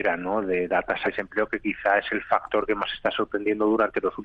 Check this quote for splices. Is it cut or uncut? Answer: cut